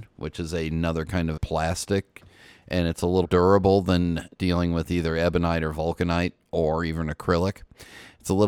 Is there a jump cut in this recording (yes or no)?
yes